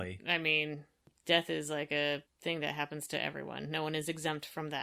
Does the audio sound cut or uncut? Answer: uncut